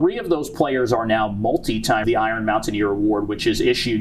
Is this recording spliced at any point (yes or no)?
yes